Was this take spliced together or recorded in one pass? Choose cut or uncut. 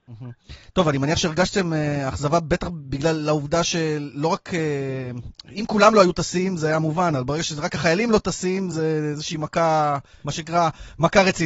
uncut